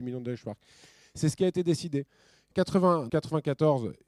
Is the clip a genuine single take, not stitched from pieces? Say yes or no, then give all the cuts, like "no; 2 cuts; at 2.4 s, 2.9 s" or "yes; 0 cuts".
no; 2 cuts; at 2.5 s, 3.1 s